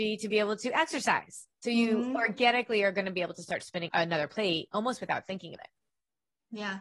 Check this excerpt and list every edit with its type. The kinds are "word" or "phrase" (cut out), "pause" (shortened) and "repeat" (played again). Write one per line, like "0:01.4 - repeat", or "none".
0:01.5 - pause
0:03.9 - word
0:05.6 - word